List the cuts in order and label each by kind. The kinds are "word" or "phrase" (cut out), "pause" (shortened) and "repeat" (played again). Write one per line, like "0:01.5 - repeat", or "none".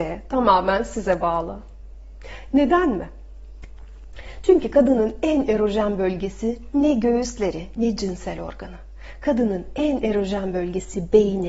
none